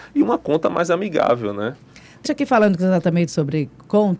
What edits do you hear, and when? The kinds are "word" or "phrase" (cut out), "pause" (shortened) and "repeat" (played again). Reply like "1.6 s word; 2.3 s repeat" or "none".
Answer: 2.2 s word; 3.3 s word